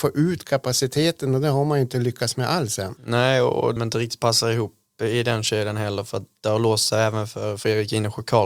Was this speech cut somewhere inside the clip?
yes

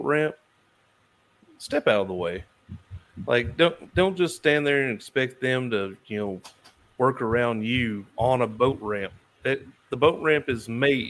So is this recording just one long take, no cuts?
yes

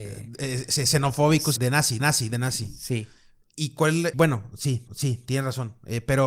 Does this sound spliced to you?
yes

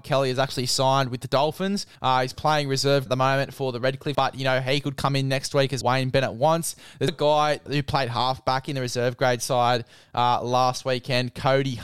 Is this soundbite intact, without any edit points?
no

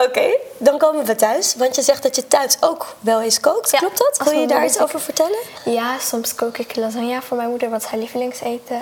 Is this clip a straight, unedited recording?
yes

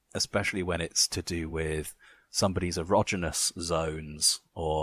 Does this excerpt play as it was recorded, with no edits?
yes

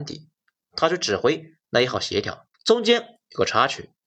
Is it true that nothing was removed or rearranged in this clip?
no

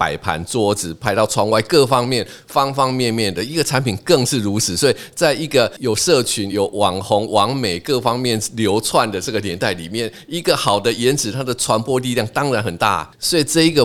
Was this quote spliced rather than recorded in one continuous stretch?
no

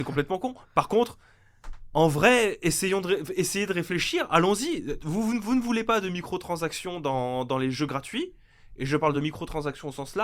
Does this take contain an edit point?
no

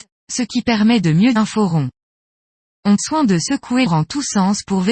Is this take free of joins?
no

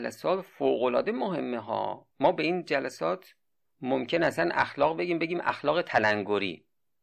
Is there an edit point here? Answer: yes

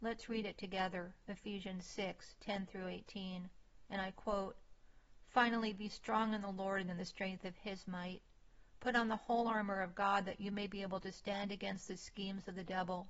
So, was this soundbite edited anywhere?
no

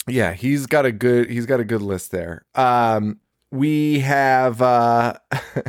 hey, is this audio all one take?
no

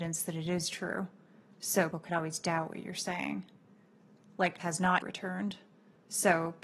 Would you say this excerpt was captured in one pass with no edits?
no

